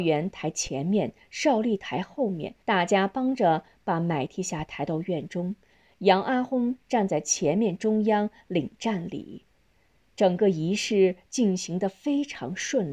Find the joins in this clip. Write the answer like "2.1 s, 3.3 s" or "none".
2.6 s